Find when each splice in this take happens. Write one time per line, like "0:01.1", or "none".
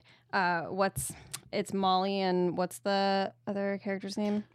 none